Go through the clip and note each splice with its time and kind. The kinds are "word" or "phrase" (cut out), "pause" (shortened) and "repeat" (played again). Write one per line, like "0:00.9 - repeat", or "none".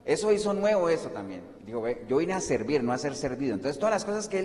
0:01.6 - pause